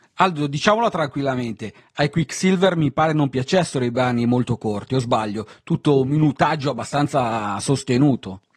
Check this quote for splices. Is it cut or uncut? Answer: uncut